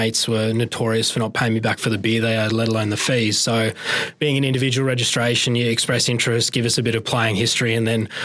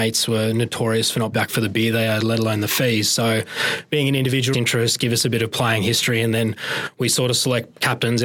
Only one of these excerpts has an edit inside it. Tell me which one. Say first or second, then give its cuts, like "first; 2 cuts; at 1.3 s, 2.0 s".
second; 2 cuts; at 1.3 s, 4.5 s